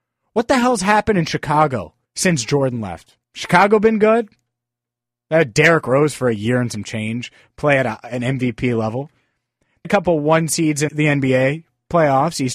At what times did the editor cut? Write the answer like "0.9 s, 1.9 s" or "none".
2.0 s, 3.2 s, 9.8 s, 10.9 s

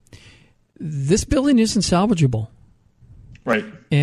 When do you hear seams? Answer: none

